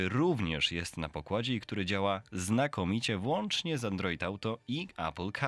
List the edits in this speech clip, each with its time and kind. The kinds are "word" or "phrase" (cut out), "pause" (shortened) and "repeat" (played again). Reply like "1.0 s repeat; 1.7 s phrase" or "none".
none